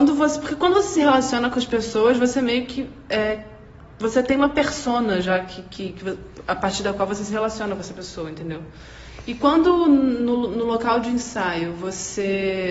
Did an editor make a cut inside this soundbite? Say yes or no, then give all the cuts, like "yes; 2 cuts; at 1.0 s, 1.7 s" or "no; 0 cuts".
yes; 1 cut; at 3.8 s